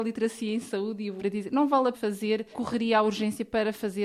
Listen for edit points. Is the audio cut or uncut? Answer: cut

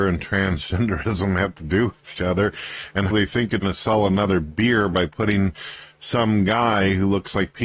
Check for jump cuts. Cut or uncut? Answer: cut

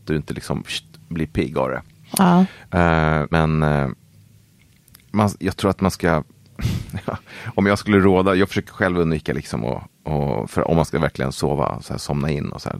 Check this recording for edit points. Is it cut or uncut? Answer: cut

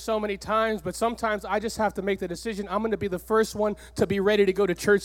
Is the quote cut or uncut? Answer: uncut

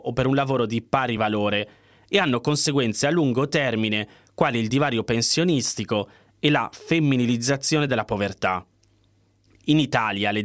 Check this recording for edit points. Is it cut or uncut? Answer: uncut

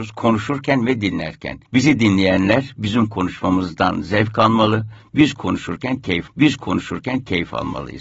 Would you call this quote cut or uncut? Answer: cut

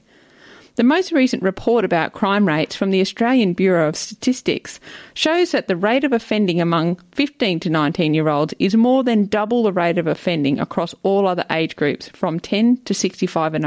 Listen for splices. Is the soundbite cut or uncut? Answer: uncut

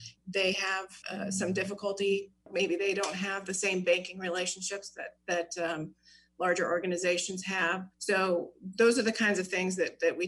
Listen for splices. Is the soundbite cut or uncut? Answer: cut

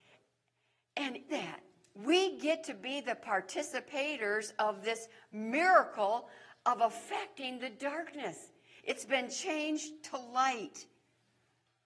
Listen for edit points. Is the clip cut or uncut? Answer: cut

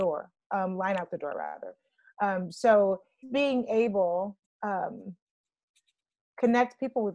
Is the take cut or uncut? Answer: cut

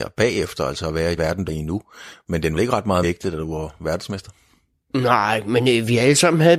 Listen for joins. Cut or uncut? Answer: cut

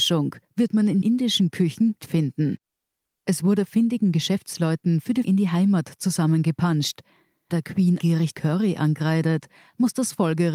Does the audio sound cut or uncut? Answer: cut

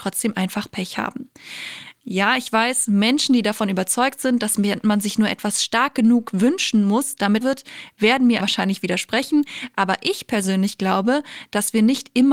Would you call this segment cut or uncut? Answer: cut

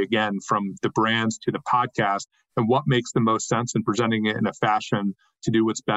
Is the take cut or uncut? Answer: uncut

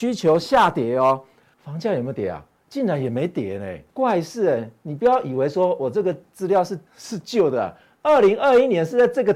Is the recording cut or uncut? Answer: cut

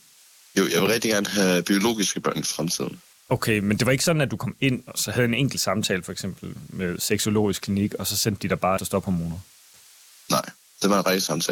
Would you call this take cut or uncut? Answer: cut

